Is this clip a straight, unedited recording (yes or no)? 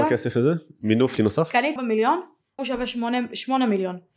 no